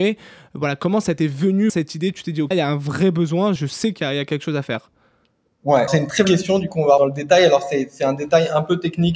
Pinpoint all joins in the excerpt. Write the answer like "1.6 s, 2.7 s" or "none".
1.7 s, 2.5 s, 3.6 s, 5.9 s, 6.2 s, 7.0 s